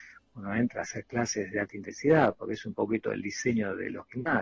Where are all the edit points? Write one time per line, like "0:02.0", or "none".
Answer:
none

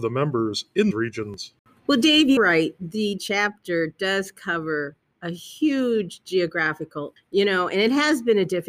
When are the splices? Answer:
0:00.9
0:02.4
0:03.2
0:07.2

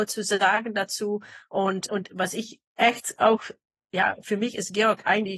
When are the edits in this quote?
0:01.9

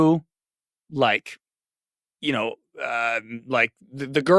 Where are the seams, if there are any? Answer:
none

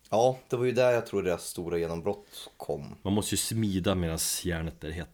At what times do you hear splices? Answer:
0:02.5

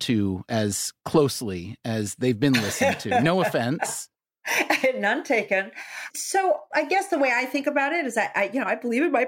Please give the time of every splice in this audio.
0:01.0
0:06.7

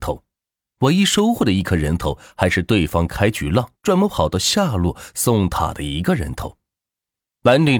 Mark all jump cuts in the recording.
0:03.8

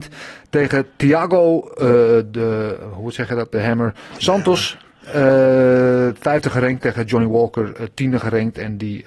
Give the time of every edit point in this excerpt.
none

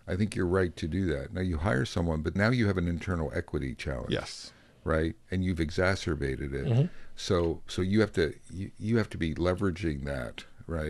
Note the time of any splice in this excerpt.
0:02.4

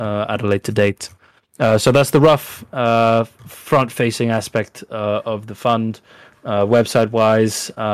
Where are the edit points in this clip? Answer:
none

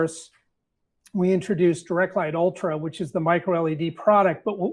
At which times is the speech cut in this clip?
none

